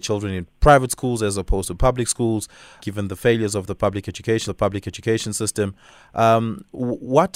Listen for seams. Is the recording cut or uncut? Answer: cut